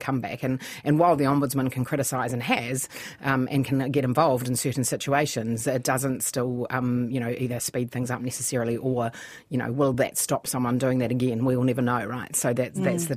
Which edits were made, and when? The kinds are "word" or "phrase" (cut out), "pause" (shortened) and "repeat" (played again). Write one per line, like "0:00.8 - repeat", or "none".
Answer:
none